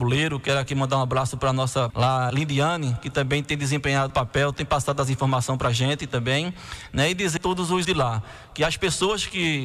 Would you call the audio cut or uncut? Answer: cut